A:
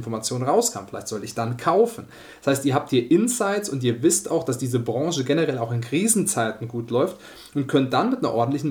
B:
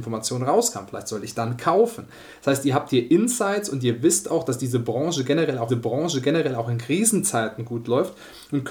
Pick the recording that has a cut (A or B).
B